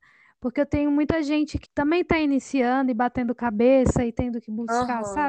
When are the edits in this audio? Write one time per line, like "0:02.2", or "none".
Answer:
0:01.6